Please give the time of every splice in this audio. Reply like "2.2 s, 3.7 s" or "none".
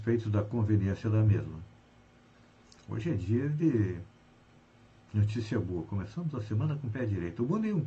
none